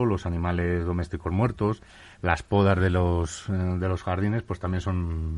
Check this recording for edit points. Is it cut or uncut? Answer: uncut